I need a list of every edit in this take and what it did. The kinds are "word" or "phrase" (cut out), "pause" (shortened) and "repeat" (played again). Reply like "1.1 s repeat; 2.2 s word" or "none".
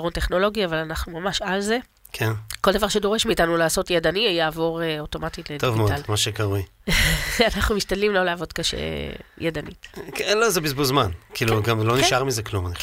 6.1 s phrase

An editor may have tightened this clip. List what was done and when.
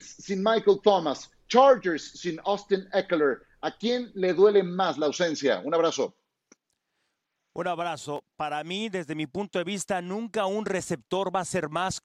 6.6 s pause

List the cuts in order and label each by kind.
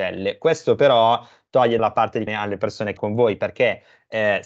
1.8 s word; 2.3 s word; 3.0 s word

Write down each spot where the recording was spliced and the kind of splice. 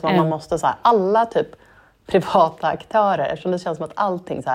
none

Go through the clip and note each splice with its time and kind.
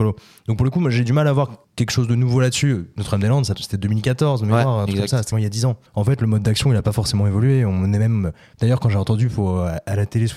1.6 s pause; 3.5 s phrase; 5.3 s word; 5.9 s pause

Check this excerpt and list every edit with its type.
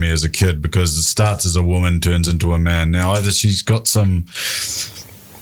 none

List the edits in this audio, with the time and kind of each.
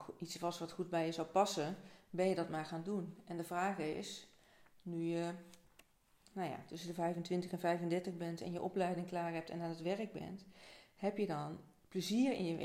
none

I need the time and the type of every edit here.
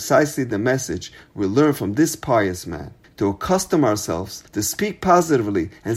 3.0 s pause; 4.5 s pause

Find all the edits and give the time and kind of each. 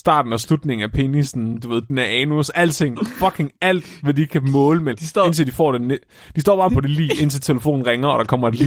1.9 s word; 4.9 s word; 6.7 s word

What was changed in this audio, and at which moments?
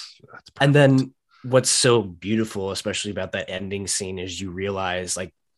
none

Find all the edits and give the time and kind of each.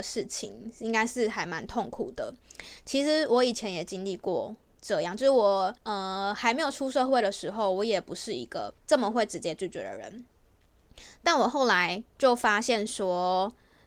5.8 s pause; 8.8 s pause; 12.1 s pause

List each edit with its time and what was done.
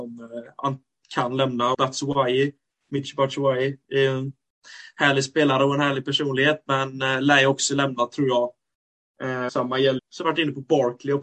1.7 s word; 9.5 s word; 10.0 s word

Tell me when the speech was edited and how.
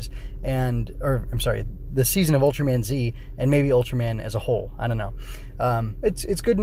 none

